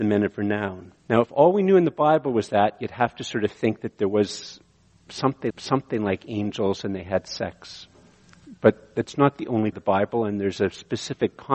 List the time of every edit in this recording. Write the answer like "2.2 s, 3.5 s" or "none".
1.0 s, 5.5 s, 9.7 s